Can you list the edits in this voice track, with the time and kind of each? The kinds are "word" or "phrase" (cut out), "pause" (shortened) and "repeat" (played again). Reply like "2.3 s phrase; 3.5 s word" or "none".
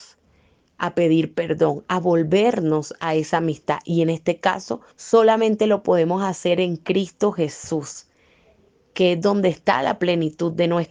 4.9 s pause